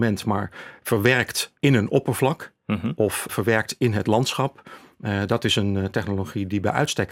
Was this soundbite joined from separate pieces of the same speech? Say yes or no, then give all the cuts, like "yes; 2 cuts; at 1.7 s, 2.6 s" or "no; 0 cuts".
yes; 2 cuts; at 1.6 s, 3.3 s